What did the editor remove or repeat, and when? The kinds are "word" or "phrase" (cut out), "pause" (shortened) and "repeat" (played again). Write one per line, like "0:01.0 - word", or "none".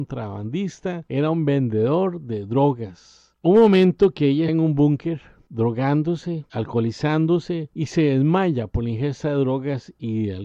0:04.5 - word